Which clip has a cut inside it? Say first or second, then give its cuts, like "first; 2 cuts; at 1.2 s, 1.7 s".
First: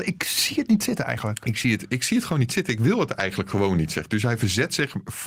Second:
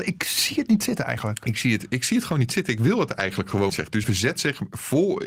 second; 2 cuts; at 3.7 s, 4.0 s